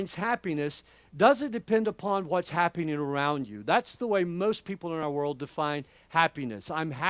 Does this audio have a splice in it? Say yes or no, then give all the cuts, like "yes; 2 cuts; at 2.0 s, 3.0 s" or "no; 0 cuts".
no; 0 cuts